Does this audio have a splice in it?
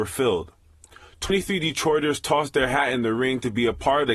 no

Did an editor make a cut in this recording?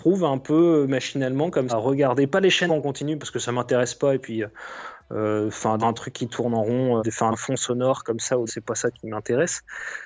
yes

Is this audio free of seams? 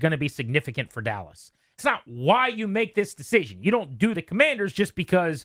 no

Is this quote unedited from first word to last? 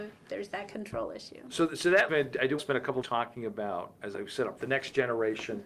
no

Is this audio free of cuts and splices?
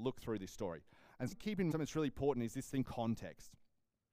no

